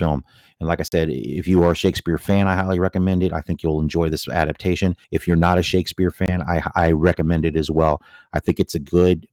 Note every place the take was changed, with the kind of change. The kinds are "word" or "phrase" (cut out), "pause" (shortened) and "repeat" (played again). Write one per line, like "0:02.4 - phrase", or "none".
0:05.0 - pause